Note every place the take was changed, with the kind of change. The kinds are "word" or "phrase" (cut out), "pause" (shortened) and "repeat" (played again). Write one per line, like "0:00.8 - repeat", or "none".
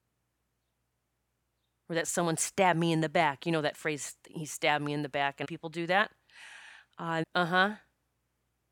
0:05.4 - phrase
0:07.2 - word